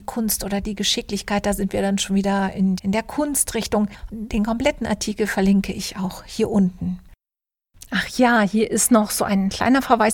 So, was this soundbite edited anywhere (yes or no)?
yes